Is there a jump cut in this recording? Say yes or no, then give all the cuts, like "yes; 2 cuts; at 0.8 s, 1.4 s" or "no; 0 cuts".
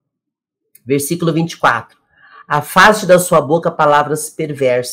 no; 0 cuts